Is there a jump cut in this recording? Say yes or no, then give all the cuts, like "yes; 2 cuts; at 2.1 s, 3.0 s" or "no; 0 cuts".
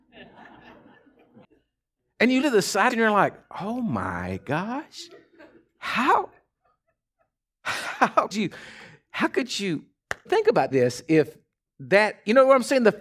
yes; 5 cuts; at 2.4 s, 2.9 s, 8.3 s, 10.3 s, 10.7 s